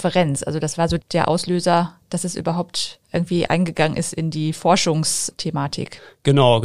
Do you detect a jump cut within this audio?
yes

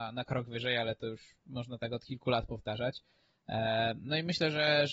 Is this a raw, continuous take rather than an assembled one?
yes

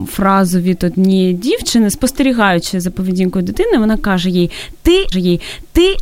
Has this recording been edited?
yes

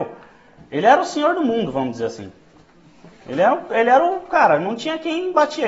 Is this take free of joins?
yes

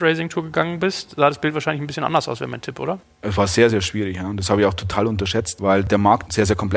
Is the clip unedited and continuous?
yes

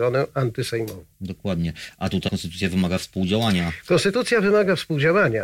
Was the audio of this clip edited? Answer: yes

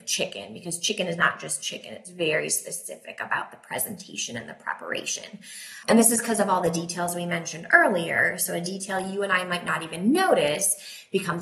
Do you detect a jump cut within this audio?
no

